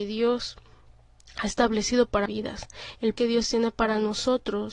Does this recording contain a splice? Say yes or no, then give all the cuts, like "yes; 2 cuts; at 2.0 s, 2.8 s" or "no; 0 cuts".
yes; 2 cuts; at 2.3 s, 3.2 s